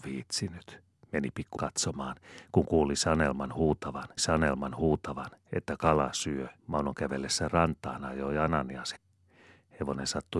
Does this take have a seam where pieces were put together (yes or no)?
yes